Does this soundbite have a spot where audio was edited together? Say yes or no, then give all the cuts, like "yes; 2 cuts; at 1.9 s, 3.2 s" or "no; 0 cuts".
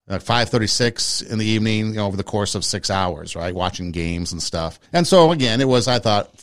yes; 1 cut; at 4.9 s